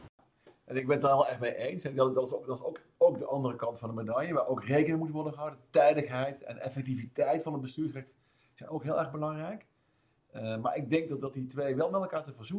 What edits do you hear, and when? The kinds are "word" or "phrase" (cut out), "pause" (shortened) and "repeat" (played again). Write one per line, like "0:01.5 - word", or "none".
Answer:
none

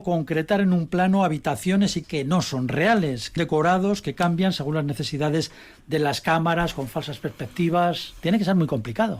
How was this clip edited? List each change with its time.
0:02.0 - word
0:03.4 - word

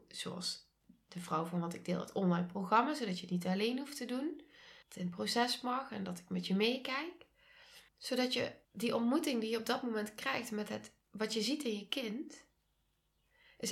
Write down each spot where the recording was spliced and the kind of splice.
0:04.8 - pause
0:07.9 - pause
0:08.6 - pause
0:11.0 - pause

